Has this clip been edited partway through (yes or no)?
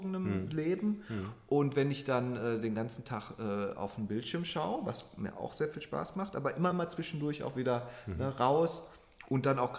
no